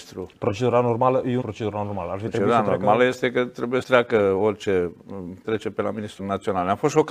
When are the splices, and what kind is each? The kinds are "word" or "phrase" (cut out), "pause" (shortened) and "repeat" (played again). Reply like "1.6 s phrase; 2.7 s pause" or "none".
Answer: 1.4 s phrase; 3.8 s word; 5.4 s word; 6.2 s word